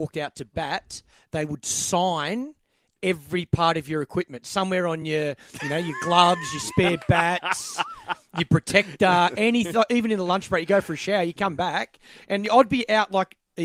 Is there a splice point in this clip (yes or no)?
no